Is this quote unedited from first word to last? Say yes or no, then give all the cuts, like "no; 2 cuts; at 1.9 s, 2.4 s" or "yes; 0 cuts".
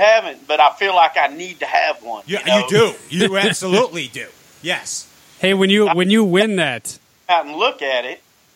yes; 0 cuts